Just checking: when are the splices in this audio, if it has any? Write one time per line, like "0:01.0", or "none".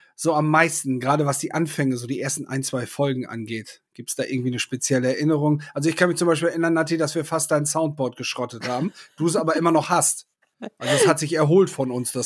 none